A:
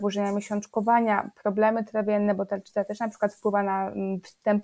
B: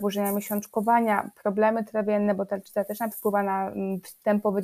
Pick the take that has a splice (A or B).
B